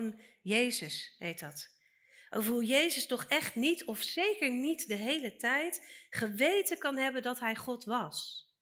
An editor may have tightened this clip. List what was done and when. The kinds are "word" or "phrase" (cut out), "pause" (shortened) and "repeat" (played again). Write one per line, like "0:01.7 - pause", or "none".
none